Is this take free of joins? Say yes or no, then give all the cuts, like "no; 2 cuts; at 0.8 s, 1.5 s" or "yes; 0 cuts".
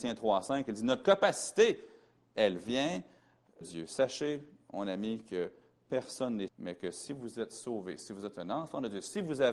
no; 2 cuts; at 3.6 s, 6.5 s